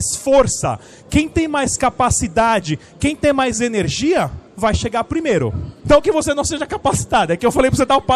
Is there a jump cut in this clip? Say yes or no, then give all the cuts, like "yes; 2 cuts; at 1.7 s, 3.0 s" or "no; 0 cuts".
yes; 1 cut; at 4.5 s